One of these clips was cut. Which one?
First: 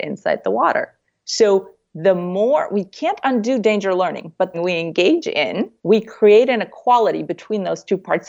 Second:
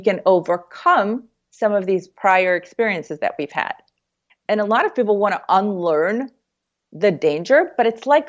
first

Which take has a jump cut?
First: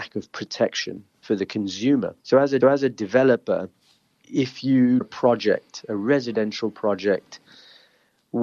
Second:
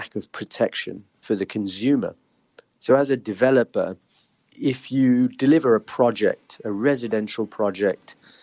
first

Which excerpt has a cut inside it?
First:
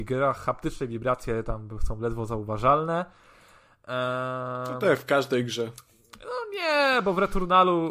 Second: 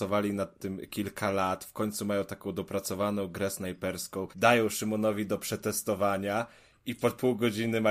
second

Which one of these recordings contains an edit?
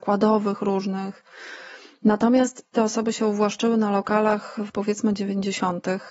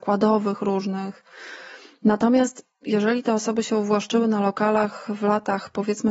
first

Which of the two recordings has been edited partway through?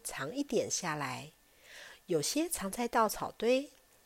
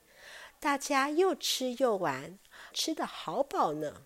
second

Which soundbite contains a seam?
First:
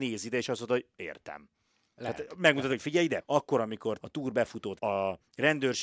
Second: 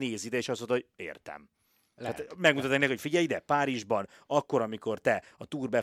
first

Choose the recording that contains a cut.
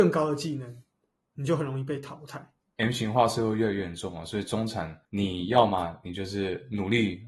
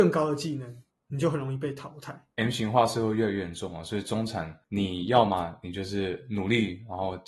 second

